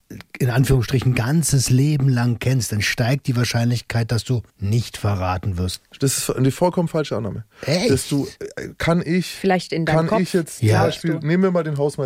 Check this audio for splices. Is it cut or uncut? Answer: cut